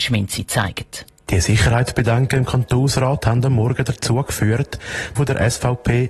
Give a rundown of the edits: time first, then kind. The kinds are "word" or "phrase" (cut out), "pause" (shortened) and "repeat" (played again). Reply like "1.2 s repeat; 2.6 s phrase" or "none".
5.2 s phrase